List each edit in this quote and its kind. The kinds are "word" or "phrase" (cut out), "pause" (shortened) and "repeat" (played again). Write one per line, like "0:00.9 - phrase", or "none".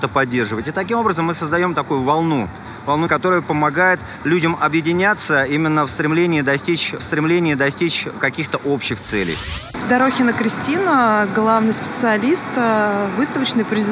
0:03.1 - word
0:07.0 - repeat